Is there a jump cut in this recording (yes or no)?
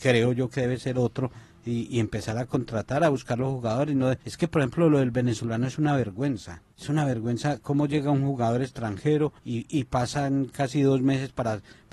yes